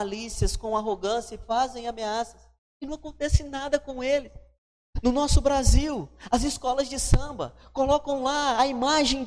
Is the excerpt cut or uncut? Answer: cut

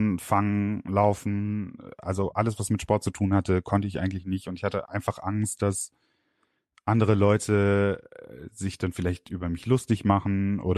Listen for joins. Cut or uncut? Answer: uncut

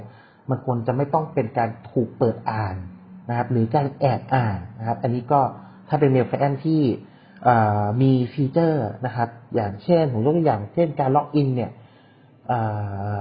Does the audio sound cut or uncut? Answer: cut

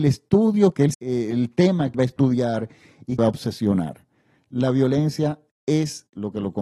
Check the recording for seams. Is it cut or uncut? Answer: cut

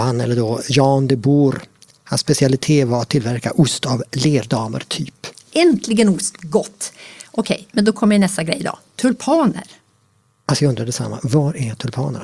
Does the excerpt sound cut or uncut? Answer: uncut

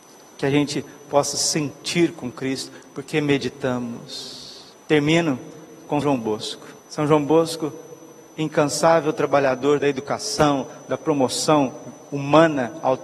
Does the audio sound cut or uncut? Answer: cut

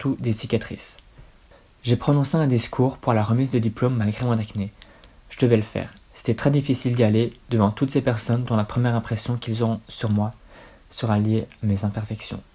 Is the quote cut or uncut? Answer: uncut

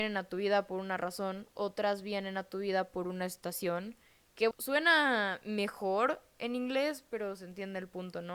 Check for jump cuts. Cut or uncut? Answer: cut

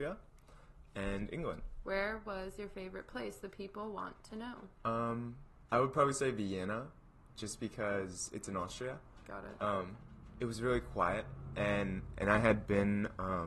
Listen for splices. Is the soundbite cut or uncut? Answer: uncut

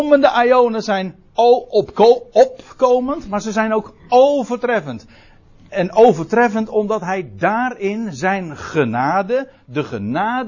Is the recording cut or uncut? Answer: uncut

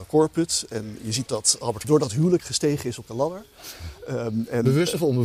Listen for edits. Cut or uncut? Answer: cut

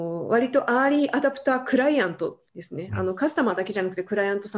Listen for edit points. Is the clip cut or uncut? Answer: cut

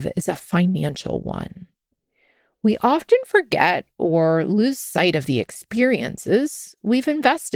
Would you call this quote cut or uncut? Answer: uncut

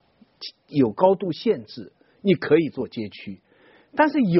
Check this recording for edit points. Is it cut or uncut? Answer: uncut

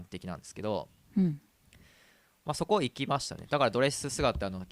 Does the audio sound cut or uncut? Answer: uncut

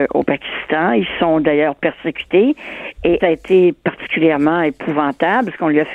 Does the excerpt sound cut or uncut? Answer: cut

